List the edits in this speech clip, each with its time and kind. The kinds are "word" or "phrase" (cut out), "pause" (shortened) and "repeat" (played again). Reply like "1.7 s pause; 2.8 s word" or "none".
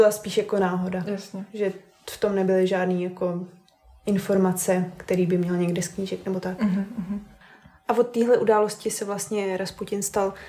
none